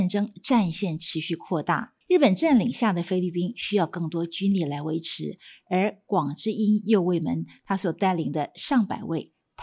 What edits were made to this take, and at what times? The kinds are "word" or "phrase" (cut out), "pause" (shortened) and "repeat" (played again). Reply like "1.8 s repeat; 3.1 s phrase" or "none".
2.0 s pause

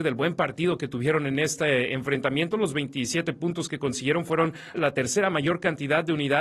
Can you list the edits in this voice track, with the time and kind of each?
4.7 s word

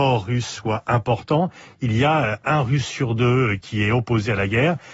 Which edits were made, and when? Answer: none

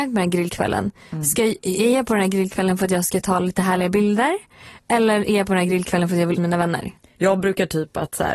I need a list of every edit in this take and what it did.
6.4 s word

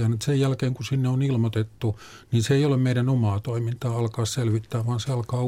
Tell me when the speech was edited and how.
none

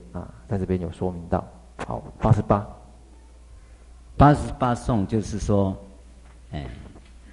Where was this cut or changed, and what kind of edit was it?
none

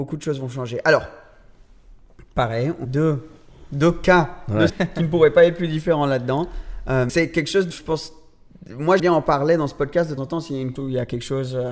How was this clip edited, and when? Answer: 2.8 s word; 4.7 s word; 7.1 s word; 7.7 s word; 9.0 s word; 10.2 s word; 10.8 s word

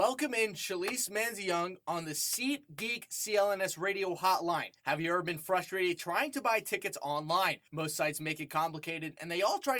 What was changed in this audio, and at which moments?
4.8 s pause; 7.7 s pause

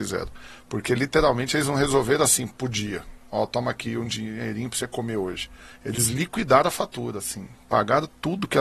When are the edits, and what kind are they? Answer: none

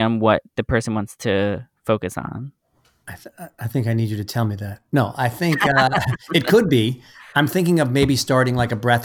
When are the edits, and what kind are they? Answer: none

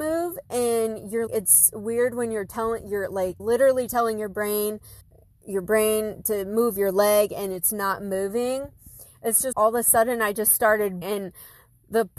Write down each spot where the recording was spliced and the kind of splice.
1.3 s word; 3.4 s word; 5.0 s pause; 9.5 s word; 11.0 s word

